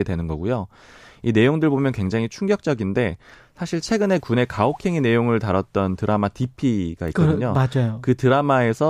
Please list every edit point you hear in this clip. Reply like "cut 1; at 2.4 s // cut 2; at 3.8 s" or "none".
none